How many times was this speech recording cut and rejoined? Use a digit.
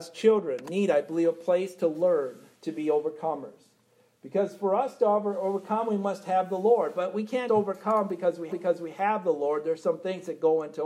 3